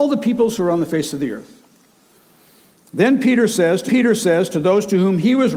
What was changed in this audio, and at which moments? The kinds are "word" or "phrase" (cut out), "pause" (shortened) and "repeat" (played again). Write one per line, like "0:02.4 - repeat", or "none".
0:03.9 - repeat